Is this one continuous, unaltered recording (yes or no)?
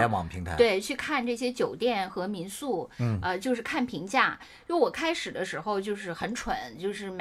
yes